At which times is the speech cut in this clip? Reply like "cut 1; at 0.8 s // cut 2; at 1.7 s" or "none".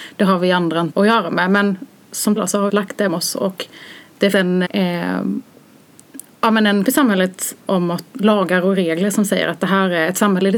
cut 1; at 0.9 s // cut 2; at 2.4 s // cut 3; at 2.7 s // cut 4; at 3.1 s // cut 5; at 4.3 s // cut 6; at 4.6 s // cut 7; at 6.8 s // cut 8; at 7.6 s // cut 9; at 8.1 s